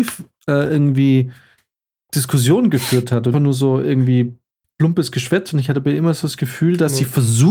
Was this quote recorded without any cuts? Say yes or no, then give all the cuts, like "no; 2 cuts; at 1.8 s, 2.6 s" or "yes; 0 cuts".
no; 1 cut; at 3.3 s